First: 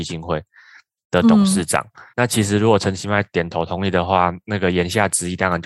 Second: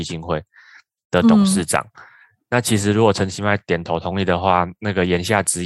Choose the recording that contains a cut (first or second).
first